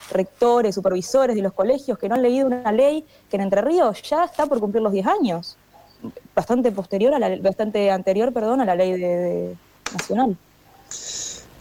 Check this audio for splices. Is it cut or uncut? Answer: uncut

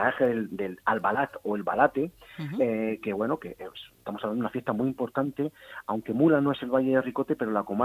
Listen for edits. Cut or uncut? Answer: cut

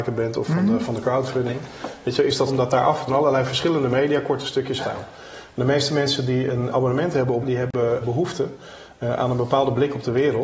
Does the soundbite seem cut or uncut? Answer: cut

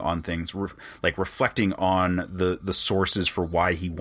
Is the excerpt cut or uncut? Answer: uncut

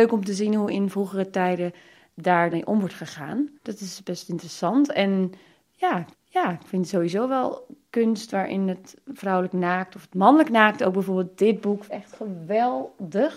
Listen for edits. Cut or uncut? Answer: cut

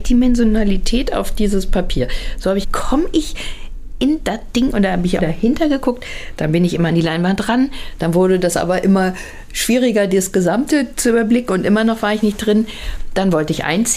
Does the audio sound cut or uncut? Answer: cut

